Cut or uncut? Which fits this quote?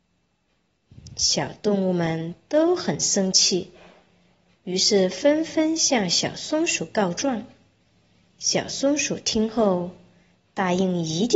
uncut